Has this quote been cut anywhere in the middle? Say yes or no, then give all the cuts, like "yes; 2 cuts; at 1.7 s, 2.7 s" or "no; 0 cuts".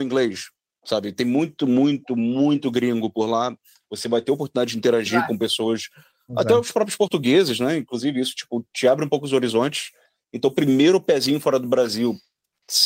no; 0 cuts